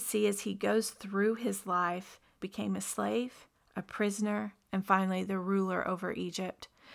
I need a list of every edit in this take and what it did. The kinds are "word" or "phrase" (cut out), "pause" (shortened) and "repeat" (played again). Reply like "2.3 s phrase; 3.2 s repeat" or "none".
2.4 s word; 3.5 s pause